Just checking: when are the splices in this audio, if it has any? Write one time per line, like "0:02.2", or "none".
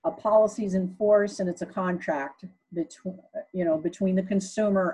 none